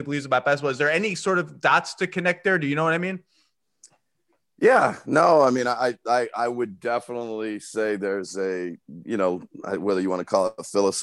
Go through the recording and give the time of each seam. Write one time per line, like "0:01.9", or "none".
none